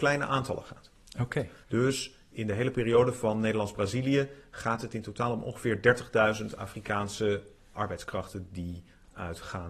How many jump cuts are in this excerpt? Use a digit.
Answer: 2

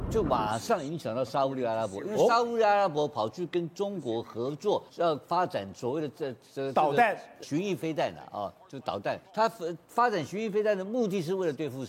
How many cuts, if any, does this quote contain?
3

